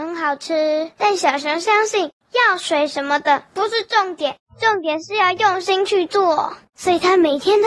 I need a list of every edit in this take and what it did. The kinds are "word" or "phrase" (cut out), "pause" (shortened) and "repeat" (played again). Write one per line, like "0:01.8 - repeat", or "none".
0:01.0 - pause